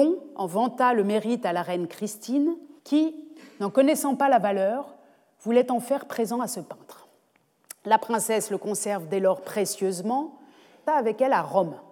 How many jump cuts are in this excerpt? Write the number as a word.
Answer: two